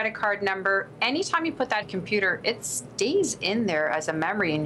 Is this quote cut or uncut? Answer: cut